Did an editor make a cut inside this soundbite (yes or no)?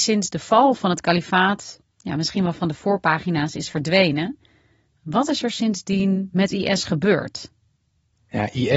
no